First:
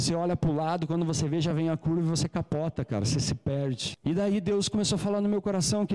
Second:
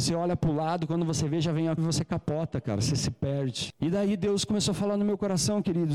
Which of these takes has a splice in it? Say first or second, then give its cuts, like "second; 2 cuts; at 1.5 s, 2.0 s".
second; 1 cut; at 1.8 s